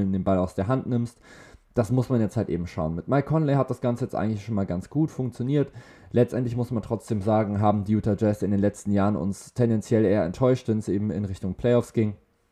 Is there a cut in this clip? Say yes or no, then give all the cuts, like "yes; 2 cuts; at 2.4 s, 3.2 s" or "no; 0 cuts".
no; 0 cuts